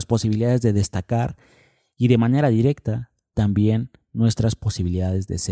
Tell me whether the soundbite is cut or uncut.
uncut